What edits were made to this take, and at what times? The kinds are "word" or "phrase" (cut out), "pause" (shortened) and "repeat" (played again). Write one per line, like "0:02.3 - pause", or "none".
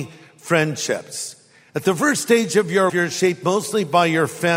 0:02.9 - word